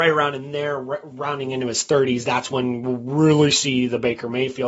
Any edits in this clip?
no; 0 cuts

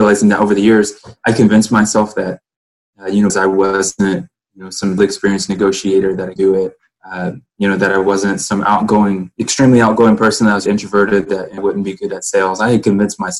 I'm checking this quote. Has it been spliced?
yes; 5 cuts; at 3.3 s, 5.0 s, 6.4 s, 10.7 s, 11.6 s

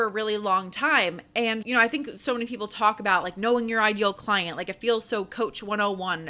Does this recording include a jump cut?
yes; 1 cut; at 1.6 s

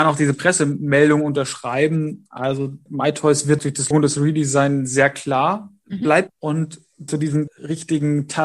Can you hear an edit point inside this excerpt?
yes; 6 cuts; at 2.9 s, 3.6 s, 3.9 s, 6.3 s, 7.1 s, 7.5 s

